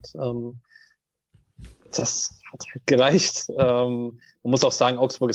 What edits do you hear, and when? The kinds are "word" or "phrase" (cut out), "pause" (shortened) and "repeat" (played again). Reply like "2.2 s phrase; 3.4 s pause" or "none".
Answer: none